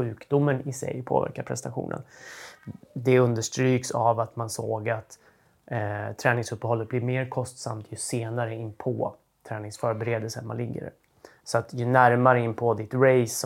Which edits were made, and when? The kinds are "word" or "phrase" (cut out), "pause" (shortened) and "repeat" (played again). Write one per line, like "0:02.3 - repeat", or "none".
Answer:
none